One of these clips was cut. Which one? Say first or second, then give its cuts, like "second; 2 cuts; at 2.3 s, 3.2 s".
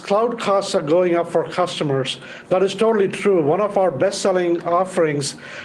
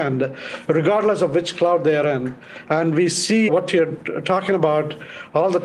second; 1 cut; at 3.5 s